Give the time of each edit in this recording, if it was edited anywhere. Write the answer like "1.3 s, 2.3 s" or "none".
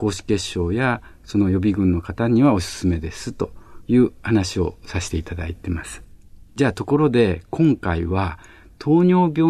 none